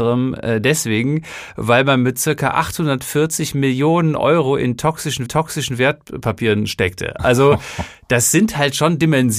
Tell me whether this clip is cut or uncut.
cut